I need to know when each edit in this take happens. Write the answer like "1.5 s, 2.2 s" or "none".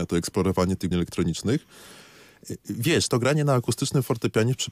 0.9 s, 3.1 s